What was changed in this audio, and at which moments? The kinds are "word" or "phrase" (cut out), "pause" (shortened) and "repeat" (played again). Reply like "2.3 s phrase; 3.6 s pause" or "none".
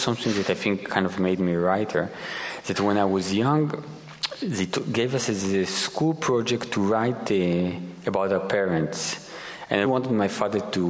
9.8 s word